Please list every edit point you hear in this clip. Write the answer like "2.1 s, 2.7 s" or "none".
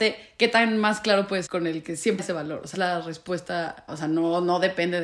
1.5 s, 2.2 s, 2.7 s, 3.9 s